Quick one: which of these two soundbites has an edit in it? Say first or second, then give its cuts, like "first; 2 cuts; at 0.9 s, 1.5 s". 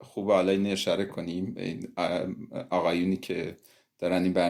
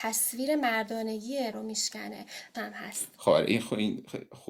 second; 2 cuts; at 1.5 s, 2.5 s